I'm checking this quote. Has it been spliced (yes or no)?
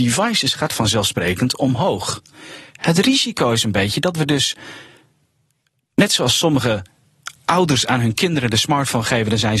no